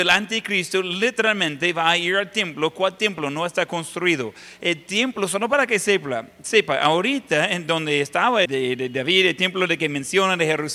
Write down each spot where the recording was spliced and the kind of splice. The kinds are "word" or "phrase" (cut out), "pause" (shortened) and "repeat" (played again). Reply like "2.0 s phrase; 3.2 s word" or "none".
8.5 s phrase